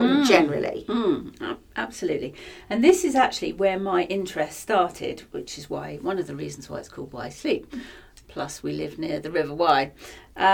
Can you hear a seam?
no; 0 cuts

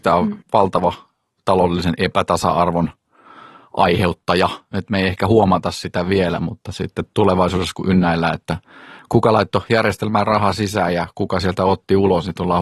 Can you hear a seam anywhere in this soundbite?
no; 0 cuts

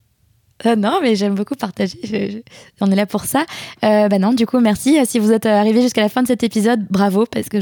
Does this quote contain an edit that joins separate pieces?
no; 0 cuts

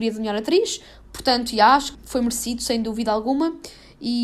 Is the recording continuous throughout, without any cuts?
no; 1 cut; at 1.9 s

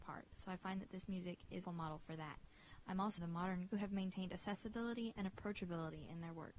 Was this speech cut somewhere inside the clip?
yes; 3 cuts; at 1.6 s, 3.2 s, 3.7 s

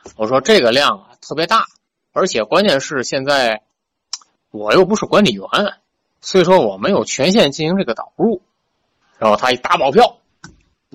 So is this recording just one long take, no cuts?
yes; 0 cuts

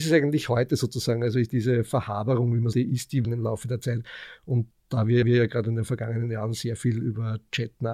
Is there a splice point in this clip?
yes; 5 cuts; at 1.5 s, 2.7 s, 3.2 s, 4.7 s, 5.2 s

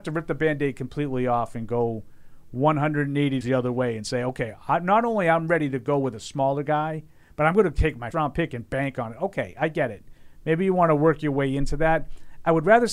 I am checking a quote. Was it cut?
yes; 2 cuts; at 3.4 s, 8.1 s

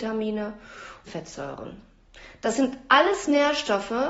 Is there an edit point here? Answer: yes; 1 cut; at 1.1 s

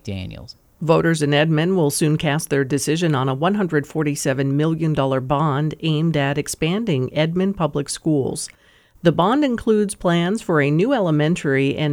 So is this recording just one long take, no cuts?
yes; 0 cuts

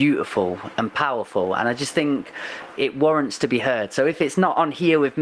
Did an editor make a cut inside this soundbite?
yes; 1 cut; at 2.8 s

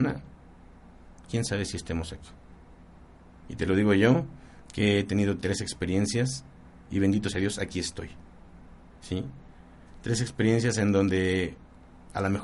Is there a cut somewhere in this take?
no; 0 cuts

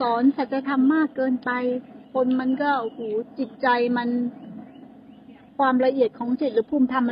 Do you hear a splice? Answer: yes; 2 cuts; at 2.0 s, 5.5 s

